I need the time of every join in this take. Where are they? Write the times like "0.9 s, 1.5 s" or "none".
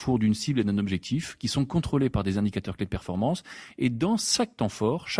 none